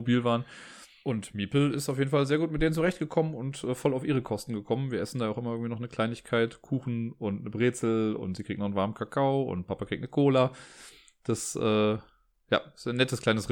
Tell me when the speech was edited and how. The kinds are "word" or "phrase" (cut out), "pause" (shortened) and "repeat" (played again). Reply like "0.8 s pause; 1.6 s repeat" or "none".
none